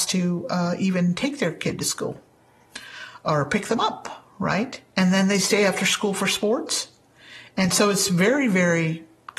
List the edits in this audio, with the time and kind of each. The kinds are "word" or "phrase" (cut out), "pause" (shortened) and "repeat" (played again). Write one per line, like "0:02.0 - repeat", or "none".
none